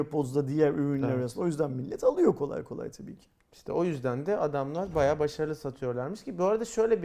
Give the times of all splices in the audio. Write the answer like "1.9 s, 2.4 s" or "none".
none